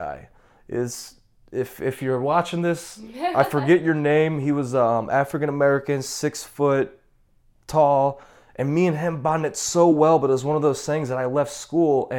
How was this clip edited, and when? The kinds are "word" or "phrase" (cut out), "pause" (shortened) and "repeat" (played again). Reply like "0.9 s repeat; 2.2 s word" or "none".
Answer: none